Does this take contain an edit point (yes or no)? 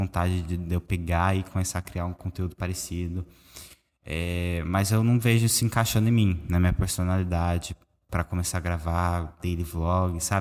no